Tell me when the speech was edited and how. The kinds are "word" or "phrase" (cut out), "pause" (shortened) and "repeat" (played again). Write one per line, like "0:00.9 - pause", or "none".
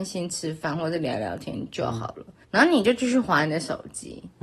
0:02.4 - pause